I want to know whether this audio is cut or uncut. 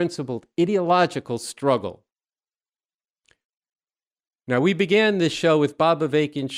uncut